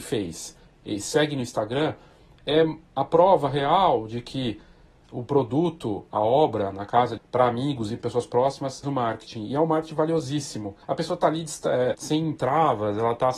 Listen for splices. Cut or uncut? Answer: cut